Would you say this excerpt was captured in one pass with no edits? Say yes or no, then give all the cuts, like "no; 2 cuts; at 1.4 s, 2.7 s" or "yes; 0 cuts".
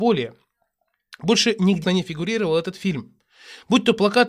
no; 1 cut; at 1.8 s